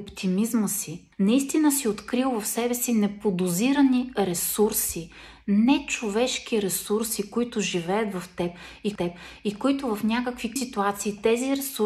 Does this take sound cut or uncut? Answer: cut